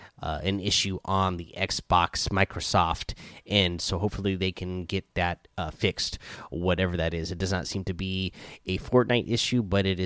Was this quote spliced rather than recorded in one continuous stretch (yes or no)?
no